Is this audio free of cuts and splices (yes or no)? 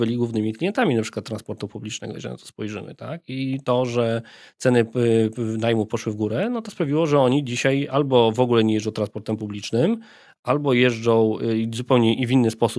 yes